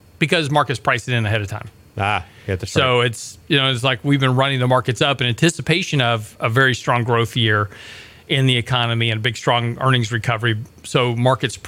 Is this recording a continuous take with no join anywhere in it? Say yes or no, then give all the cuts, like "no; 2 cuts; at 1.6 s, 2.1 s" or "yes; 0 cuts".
yes; 0 cuts